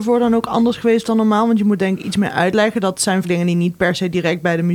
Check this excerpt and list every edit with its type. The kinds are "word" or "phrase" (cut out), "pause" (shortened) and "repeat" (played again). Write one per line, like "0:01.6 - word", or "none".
0:03.2 - word

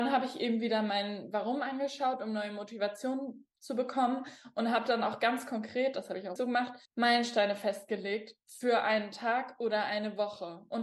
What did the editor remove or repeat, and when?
0:06.4 - word
0:06.9 - pause

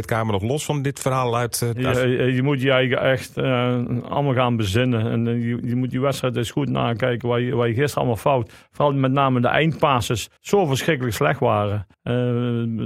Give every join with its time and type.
0:01.9 - word
0:10.4 - pause
0:11.9 - pause

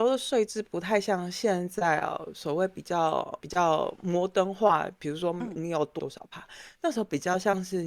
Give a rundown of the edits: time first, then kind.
0:03.4 - word

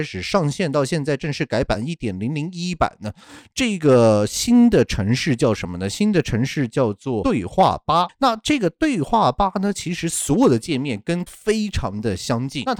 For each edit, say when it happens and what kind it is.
0:11.3 - word

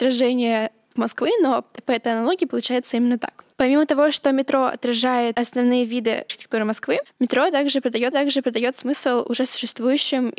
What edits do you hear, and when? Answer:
0:01.0 - phrase
0:03.5 - pause
0:08.1 - repeat

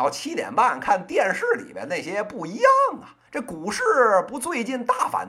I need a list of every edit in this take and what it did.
0:03.3 - pause

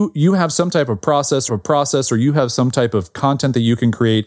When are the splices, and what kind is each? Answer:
0:01.5 - repeat

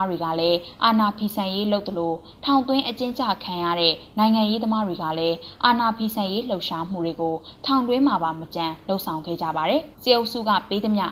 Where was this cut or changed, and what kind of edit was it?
0:09.9 - pause

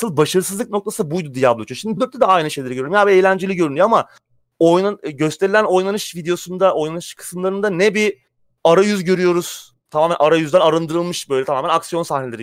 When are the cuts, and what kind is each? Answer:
0:02.0 - word

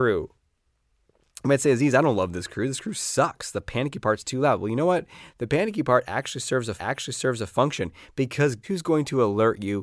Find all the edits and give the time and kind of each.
0:06.8 - repeat
0:08.6 - word

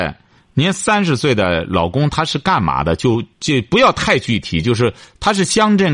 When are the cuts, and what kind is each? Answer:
none

